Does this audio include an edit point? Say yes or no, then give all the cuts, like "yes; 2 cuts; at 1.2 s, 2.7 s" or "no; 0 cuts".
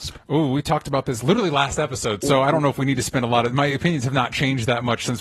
no; 0 cuts